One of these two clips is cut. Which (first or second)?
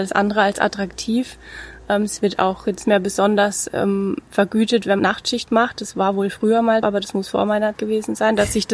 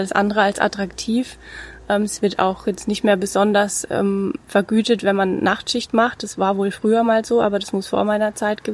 first